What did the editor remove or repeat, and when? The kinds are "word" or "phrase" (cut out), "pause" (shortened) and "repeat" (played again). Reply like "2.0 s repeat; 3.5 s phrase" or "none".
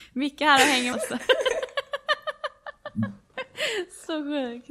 0.9 s word